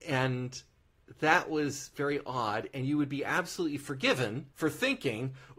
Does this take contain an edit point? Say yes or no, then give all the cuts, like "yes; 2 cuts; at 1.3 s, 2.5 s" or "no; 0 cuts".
yes; 1 cut; at 4.5 s